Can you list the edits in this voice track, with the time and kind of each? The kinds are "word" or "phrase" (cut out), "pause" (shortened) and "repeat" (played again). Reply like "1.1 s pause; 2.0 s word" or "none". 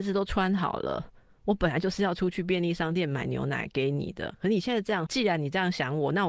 5.1 s word